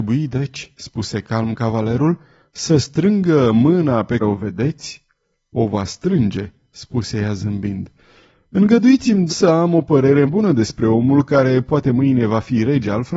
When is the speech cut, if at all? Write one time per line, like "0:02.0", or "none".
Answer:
0:04.2
0:09.3
0:10.3